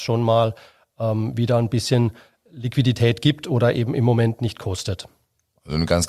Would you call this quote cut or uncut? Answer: uncut